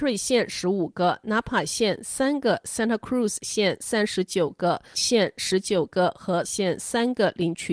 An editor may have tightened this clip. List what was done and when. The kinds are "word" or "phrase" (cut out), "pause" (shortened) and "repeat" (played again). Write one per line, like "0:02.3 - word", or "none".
0:04.9 - word
0:06.4 - word